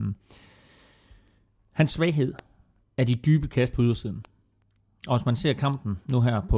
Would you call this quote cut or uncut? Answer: uncut